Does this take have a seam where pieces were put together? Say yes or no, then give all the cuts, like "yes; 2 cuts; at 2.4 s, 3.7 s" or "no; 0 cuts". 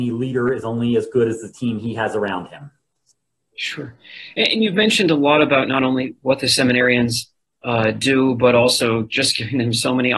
no; 0 cuts